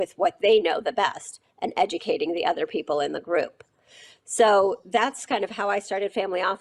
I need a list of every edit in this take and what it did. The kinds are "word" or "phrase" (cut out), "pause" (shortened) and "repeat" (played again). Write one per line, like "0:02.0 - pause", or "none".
none